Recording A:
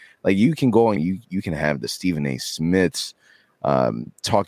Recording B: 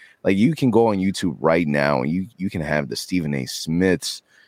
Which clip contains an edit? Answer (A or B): A